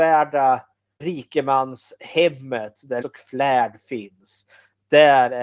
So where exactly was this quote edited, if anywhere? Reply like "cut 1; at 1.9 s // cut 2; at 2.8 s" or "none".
cut 1; at 1.0 s // cut 2; at 3.0 s